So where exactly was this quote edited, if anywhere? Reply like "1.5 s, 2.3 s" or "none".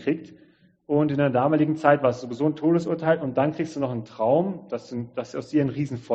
none